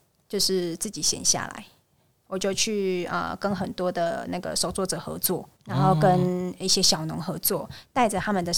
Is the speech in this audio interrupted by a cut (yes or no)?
yes